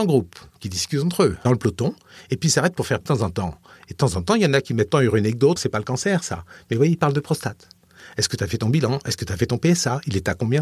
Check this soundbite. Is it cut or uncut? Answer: cut